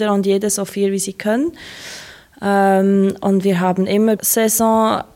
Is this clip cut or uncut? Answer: cut